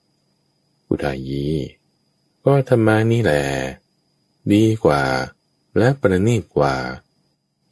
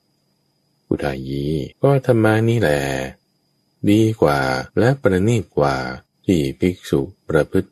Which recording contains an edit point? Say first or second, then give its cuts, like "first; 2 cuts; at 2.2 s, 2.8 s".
second; 3 cuts; at 1.7 s, 4.7 s, 6.1 s